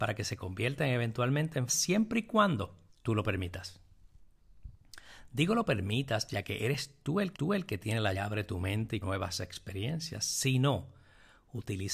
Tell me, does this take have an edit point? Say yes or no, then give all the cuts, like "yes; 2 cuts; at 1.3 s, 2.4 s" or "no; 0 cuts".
yes; 5 cuts; at 1.7 s, 2.9 s, 7.3 s, 8.1 s, 9.0 s